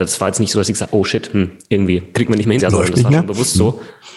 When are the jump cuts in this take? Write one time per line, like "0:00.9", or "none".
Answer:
0:02.1
0:02.6